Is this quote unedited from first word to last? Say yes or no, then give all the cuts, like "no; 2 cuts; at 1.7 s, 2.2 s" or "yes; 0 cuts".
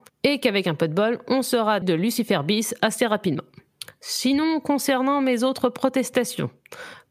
no; 1 cut; at 1.8 s